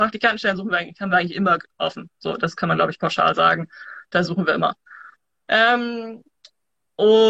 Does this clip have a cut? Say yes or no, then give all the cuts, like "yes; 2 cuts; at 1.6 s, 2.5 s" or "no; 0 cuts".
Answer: no; 0 cuts